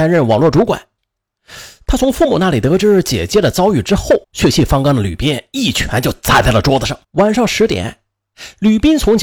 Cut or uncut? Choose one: cut